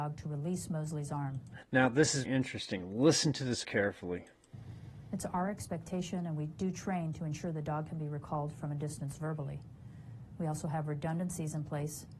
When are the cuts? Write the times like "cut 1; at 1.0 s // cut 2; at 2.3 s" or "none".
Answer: cut 1; at 2.2 s // cut 2; at 3.6 s